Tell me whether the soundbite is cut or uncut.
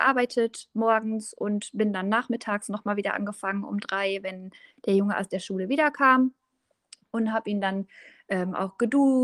uncut